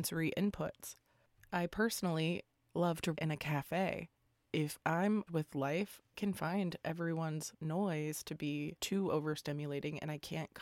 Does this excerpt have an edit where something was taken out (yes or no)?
yes